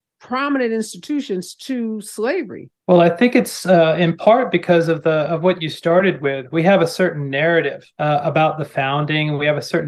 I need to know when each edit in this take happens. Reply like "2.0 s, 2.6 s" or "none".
2.8 s, 7.9 s

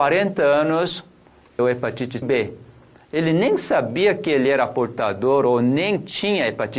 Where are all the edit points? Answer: 1.6 s, 2.2 s

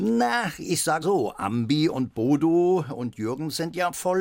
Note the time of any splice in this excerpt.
1.0 s

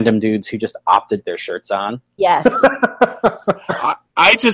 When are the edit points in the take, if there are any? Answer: 1.2 s

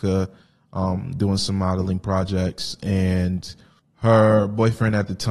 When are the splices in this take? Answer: 3.8 s

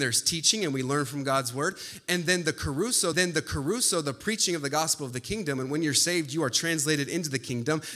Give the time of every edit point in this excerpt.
3.1 s

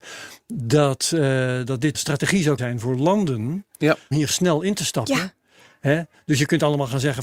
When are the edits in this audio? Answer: 1.9 s, 2.6 s, 4.1 s

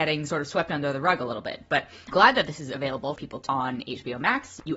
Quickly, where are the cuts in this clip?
2.1 s, 3.1 s, 3.5 s

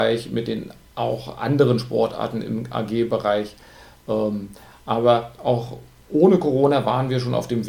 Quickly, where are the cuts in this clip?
none

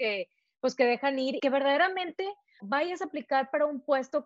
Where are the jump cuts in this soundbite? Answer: 1.4 s, 2.6 s

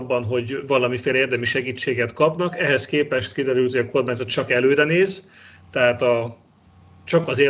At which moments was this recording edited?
none

